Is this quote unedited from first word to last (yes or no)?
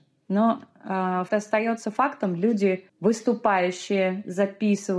no